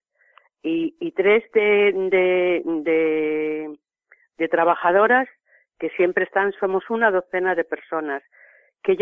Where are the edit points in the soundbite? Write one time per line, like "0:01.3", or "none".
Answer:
none